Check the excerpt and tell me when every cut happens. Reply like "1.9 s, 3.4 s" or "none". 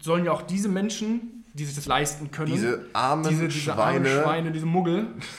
1.8 s